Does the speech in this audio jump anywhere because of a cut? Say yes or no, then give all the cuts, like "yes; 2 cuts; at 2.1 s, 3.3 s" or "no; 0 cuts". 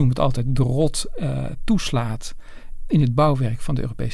yes; 1 cut; at 2.9 s